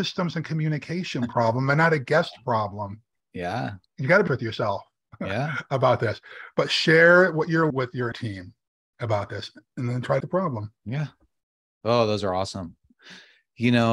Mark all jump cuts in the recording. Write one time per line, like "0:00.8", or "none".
0:03.9
0:04.3
0:07.7
0:08.1
0:08.7
0:09.6
0:10.2
0:10.8